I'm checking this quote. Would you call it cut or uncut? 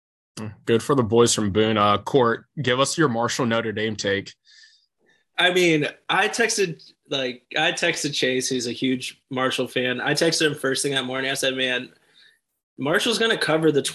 uncut